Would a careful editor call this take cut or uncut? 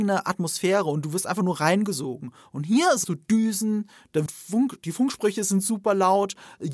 cut